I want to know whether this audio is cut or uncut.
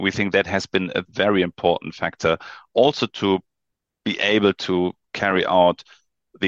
uncut